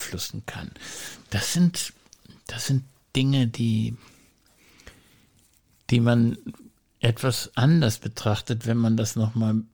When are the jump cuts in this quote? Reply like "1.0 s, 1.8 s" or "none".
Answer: none